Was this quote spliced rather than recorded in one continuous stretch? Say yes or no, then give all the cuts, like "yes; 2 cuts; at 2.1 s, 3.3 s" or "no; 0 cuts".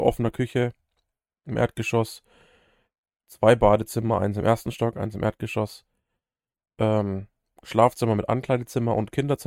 yes; 1 cut; at 7.5 s